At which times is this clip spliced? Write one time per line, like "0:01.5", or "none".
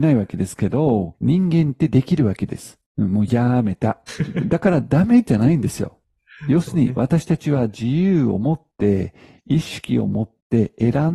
0:02.9